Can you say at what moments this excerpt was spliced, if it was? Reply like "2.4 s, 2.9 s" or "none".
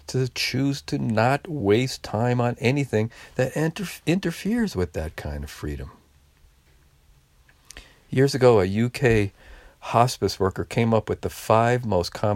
none